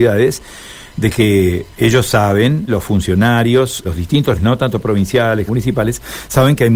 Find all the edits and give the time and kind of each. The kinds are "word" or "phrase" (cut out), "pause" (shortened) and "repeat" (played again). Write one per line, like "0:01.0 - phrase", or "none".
0:02.7 - word
0:03.8 - word
0:04.4 - word
0:05.5 - word